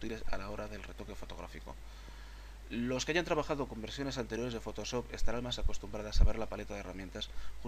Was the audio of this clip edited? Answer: no; 0 cuts

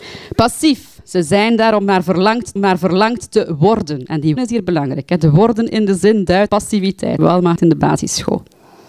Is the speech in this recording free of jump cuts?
no; 5 cuts; at 2.6 s, 4.4 s, 6.5 s, 7.2 s, 7.6 s

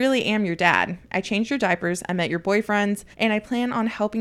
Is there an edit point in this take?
yes; 1 cut; at 3.1 s

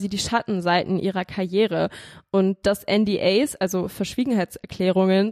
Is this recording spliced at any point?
no; 0 cuts

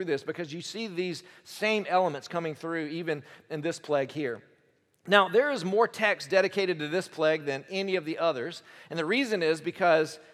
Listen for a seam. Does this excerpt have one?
no; 0 cuts

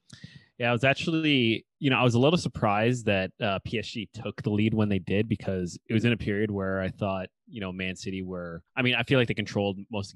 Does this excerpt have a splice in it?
yes; 1 cut; at 8.7 s

